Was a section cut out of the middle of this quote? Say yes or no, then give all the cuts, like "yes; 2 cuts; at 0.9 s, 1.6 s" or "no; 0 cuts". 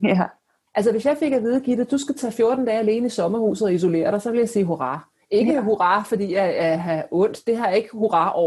no; 0 cuts